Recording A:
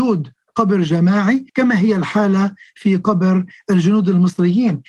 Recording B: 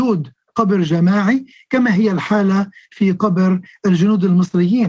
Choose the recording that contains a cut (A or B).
A